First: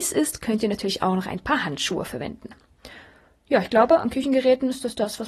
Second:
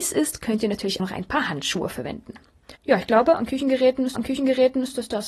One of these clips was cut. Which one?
second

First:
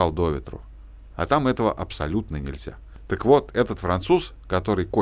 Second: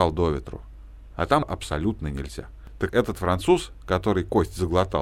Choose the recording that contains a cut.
second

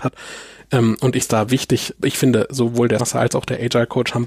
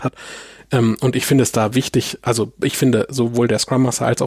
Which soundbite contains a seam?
first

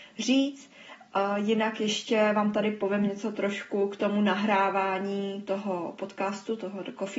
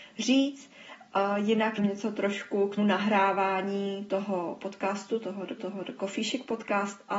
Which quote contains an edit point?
second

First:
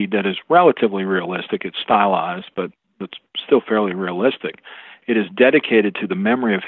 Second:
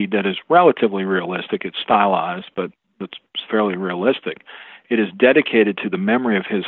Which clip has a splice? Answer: second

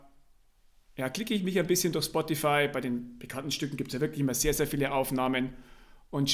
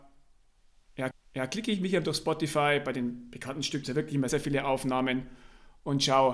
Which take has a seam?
second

